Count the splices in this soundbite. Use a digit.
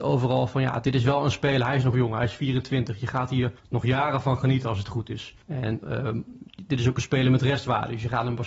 2